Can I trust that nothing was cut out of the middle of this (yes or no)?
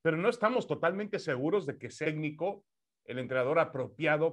no